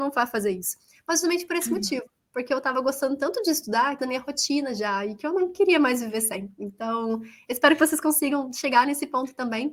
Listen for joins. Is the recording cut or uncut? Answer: cut